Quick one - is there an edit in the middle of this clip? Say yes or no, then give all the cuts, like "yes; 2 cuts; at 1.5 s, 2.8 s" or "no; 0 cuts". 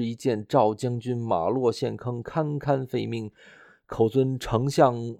no; 0 cuts